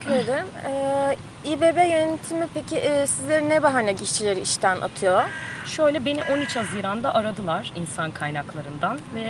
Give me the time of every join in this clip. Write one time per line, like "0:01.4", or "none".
0:03.9